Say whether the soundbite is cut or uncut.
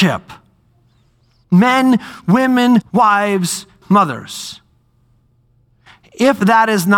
cut